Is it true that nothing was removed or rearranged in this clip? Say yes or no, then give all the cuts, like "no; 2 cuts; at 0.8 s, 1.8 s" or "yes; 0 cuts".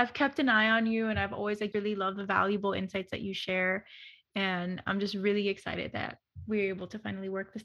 no; 1 cut; at 1.7 s